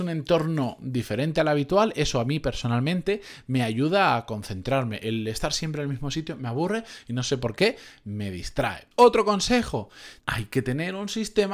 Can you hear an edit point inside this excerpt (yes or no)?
yes